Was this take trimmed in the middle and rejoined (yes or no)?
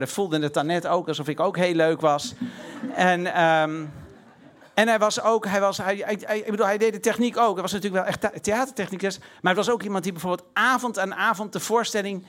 no